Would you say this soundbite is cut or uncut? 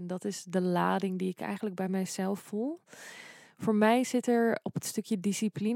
uncut